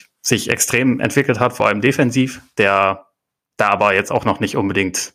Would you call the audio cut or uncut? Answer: uncut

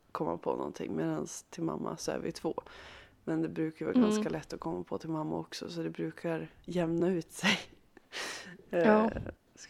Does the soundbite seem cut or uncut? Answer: uncut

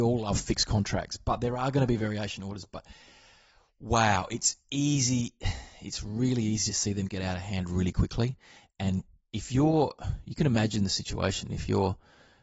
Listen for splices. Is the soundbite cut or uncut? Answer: uncut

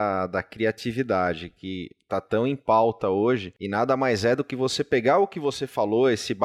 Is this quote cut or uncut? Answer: uncut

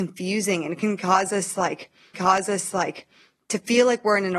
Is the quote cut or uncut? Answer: cut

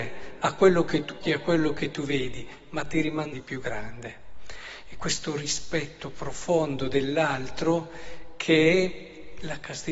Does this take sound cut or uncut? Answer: cut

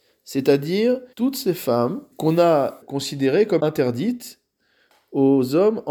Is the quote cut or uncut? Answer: cut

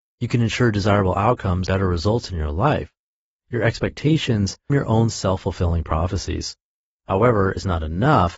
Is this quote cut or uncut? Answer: cut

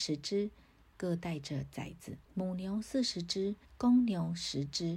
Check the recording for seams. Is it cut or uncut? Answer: cut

